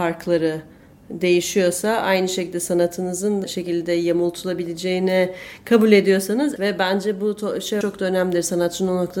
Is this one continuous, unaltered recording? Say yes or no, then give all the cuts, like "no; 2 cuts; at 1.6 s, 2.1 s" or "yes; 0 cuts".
no; 3 cuts; at 3.4 s, 6.6 s, 7.8 s